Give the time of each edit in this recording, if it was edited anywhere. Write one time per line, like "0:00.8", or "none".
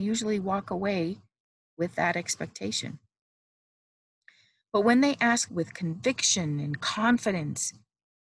0:05.5